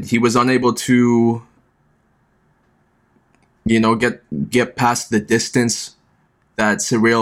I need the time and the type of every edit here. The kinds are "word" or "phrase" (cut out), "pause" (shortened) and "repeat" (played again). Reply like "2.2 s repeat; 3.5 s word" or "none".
none